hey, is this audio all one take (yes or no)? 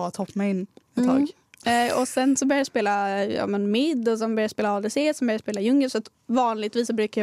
yes